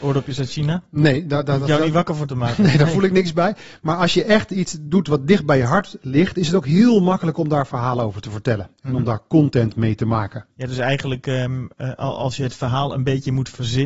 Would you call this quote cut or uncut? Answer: uncut